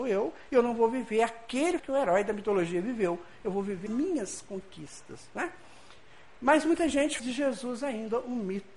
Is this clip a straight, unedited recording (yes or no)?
no